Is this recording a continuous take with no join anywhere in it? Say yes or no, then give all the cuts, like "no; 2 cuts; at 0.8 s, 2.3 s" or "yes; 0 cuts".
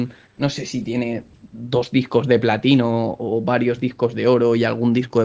yes; 0 cuts